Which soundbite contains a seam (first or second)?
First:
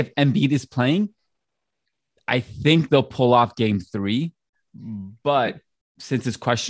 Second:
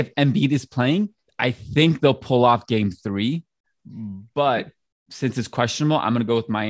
second